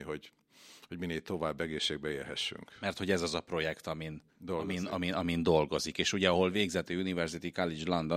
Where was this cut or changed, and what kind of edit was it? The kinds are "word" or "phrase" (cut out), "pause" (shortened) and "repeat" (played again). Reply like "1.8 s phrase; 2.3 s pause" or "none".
4.3 s pause